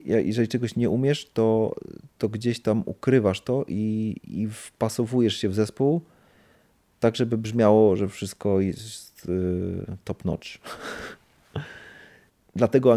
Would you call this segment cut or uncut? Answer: uncut